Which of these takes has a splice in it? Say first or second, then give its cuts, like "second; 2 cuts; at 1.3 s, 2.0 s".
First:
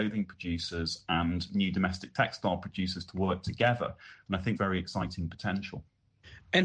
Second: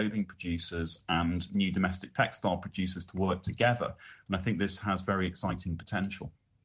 first; 1 cut; at 4.6 s